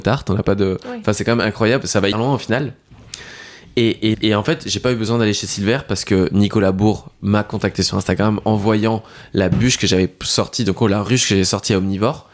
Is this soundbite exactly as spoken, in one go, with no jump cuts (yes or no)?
no